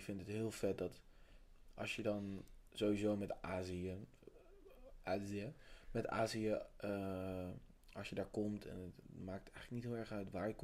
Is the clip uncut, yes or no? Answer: yes